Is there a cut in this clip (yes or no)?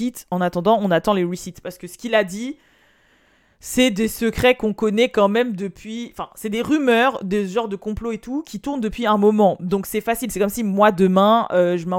no